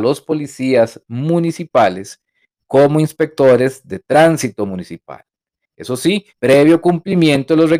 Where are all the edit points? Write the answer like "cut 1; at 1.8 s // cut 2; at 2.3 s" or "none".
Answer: cut 1; at 6.3 s